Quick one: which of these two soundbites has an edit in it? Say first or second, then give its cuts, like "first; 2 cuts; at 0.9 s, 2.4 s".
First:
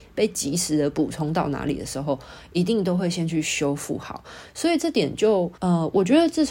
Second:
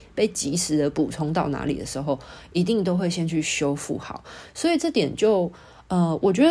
first; 1 cut; at 5.6 s